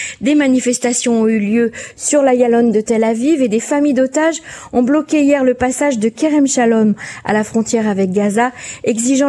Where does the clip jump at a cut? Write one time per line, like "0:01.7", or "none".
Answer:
none

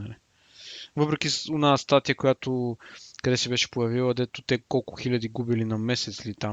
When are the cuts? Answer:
none

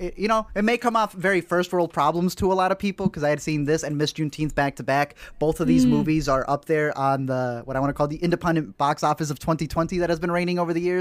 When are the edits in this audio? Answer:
none

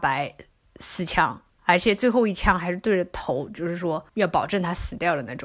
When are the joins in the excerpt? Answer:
0:01.5
0:04.1

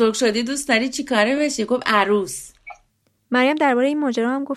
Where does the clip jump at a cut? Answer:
none

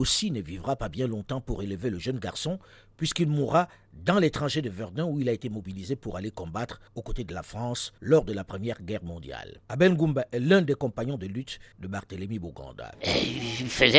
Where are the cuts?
0:06.9
0:08.0
0:09.6
0:11.7

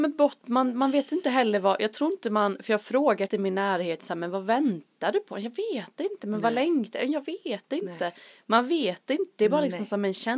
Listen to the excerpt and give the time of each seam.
0:03.3

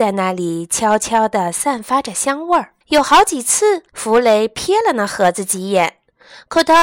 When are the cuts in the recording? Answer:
0:02.8
0:03.9

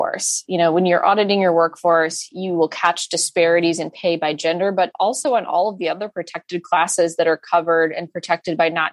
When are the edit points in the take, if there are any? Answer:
none

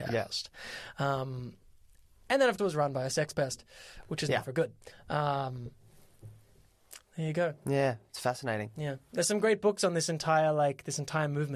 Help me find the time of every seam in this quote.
0:02.6

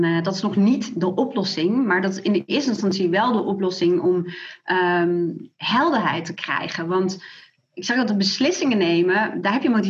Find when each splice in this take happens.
none

